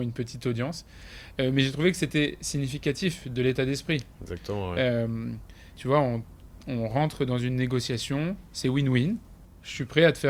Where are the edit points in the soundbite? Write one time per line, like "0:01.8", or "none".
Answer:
none